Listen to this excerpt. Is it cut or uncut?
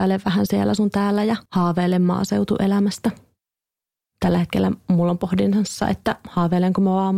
cut